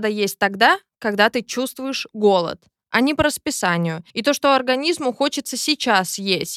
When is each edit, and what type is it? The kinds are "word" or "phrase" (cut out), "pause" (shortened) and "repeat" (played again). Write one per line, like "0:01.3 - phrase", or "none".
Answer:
0:04.1 - pause